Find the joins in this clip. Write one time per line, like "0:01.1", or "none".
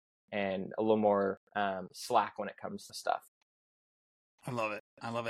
0:01.5
0:02.9